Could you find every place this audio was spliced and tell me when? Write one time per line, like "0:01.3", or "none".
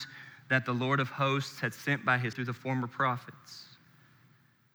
0:02.3

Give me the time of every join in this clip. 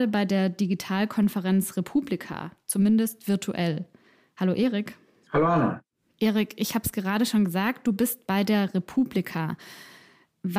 none

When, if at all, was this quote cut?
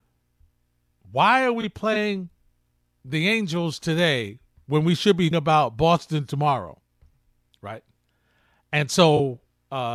0:05.3

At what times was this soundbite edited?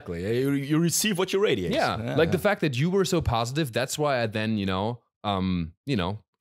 none

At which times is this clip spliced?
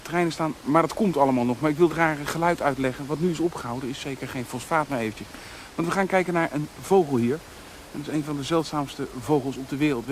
0:01.9

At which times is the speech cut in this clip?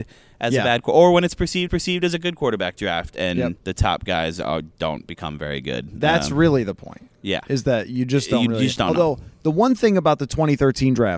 0:01.7
0:03.6
0:04.7
0:08.8

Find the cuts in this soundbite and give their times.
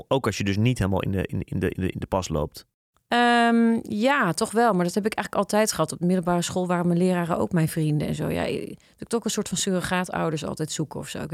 none

